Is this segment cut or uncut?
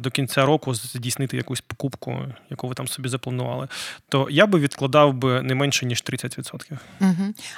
uncut